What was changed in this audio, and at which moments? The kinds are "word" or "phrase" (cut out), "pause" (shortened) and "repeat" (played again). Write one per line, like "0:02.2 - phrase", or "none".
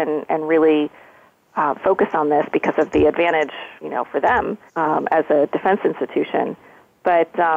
0:03.8 - pause
0:04.7 - pause

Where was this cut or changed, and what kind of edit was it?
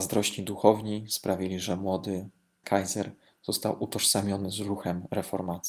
0:02.6 - word

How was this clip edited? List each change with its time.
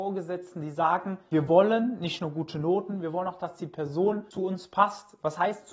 none

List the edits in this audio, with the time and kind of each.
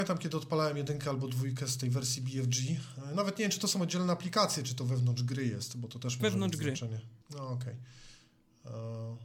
0:07.2 - pause

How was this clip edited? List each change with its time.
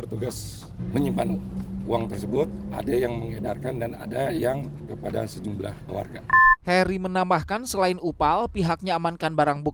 0:04.9 - word

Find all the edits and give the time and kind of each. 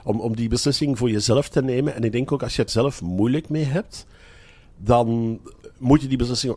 0:02.7 - word

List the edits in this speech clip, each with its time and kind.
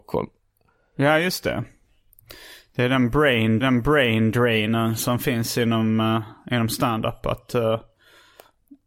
0:03.6 - repeat

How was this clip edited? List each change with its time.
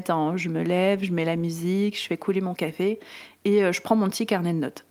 none

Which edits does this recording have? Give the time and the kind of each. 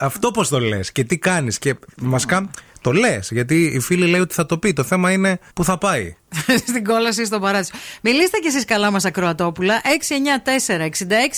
0:05.5 - pause

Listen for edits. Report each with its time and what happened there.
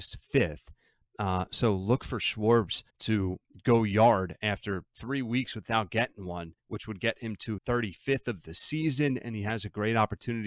0:02.9 - pause
0:06.6 - pause
0:07.6 - word

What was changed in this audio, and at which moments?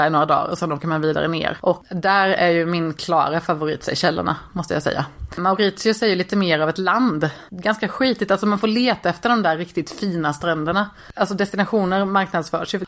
0:07.5 - pause

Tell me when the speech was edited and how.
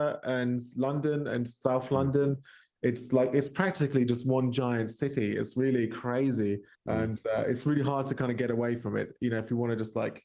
0:06.7 - pause

